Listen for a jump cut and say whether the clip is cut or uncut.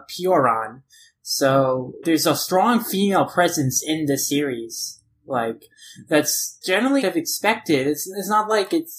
cut